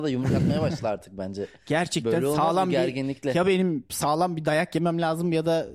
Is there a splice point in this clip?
no; 0 cuts

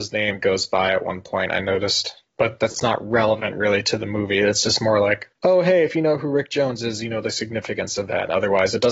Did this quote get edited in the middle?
no; 0 cuts

